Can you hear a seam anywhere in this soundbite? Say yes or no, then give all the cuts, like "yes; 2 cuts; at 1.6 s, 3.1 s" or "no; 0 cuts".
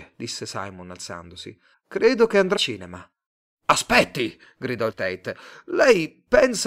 yes; 3 cuts; at 1.7 s, 2.6 s, 4.9 s